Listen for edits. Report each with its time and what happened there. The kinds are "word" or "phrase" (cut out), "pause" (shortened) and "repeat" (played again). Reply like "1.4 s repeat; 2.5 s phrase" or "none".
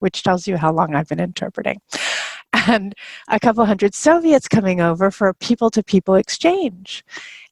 none